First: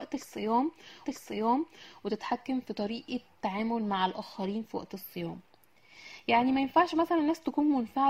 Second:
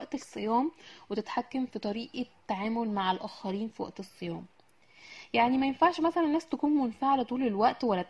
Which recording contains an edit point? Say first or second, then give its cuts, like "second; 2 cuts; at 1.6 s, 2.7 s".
first; 1 cut; at 1.0 s